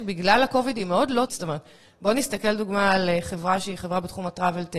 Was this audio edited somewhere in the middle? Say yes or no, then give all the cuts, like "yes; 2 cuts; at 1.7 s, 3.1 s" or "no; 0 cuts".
yes; 1 cut; at 1.3 s